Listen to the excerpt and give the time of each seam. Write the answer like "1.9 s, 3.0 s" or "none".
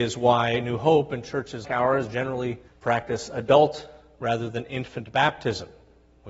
1.6 s, 2.7 s